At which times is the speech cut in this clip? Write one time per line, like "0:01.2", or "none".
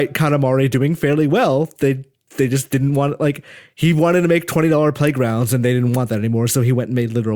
none